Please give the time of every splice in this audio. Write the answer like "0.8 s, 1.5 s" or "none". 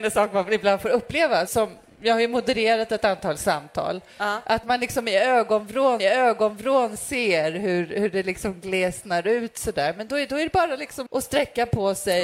1.5 s, 4.6 s, 6.0 s, 11.1 s